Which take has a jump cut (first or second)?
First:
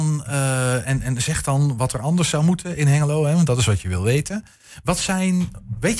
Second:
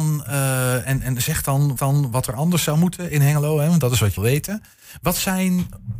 second